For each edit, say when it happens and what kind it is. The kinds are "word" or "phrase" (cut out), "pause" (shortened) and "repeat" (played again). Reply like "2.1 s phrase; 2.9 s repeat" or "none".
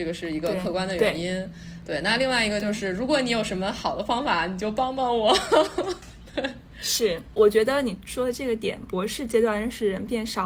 6.7 s word